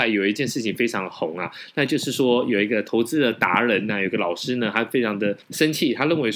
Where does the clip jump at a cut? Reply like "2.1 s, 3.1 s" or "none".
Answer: 5.4 s